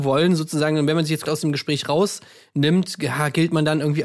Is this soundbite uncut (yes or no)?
no